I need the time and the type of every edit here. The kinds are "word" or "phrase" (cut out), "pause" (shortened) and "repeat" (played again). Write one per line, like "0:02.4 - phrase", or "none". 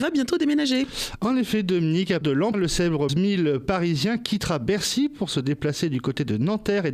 0:02.2 - word
0:02.5 - word
0:03.1 - word